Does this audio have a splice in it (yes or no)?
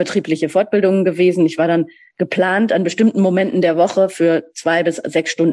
no